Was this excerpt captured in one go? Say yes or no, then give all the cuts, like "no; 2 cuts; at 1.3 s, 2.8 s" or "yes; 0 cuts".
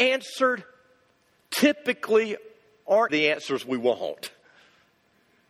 no; 1 cut; at 3.1 s